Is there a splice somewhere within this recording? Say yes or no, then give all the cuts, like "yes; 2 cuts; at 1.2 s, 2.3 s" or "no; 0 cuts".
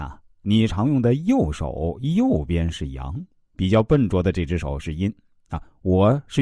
no; 0 cuts